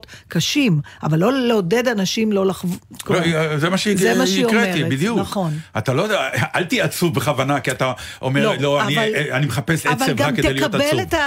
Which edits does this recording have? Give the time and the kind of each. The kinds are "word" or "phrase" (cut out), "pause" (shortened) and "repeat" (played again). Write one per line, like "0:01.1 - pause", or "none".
none